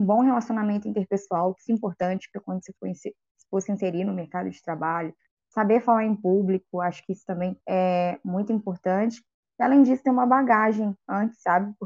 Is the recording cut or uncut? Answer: cut